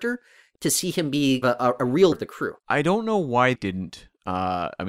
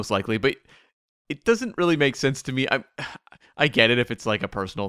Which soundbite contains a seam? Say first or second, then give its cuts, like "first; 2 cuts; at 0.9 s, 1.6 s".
first; 4 cuts; at 1.4 s, 2.1 s, 2.6 s, 3.5 s